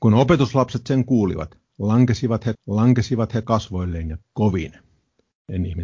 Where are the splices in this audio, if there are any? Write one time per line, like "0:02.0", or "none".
0:02.5
0:04.2